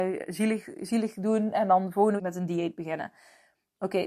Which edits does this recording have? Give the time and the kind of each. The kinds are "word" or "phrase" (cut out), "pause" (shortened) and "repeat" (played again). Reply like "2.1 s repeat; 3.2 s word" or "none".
2.2 s word